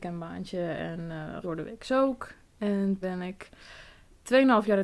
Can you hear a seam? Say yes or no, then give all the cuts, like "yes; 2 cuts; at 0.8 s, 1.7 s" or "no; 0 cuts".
yes; 2 cuts; at 1.4 s, 3.0 s